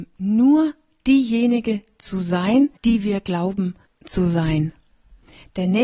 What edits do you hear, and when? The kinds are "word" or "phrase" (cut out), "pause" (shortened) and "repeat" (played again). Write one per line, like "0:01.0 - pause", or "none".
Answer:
0:02.8 - pause
0:03.9 - pause